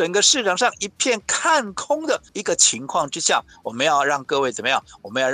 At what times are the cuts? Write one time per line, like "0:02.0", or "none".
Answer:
0:02.3